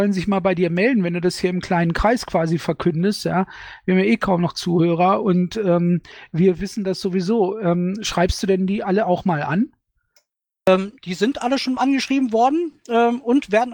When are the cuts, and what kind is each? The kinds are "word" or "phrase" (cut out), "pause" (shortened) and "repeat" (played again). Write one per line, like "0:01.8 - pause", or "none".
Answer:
0:11.0 - pause